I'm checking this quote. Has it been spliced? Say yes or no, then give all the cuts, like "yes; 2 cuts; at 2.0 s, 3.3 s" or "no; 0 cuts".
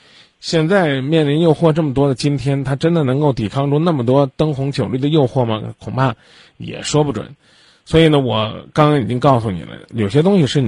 no; 0 cuts